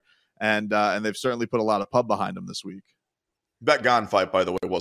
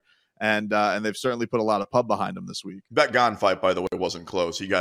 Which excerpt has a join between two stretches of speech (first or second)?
second